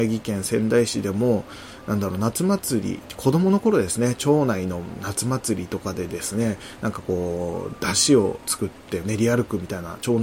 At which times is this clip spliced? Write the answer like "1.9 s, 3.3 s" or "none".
9.0 s